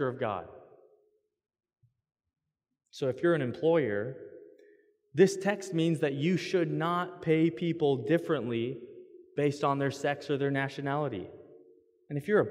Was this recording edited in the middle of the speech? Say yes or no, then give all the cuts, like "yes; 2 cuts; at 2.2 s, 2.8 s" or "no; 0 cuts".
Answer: no; 0 cuts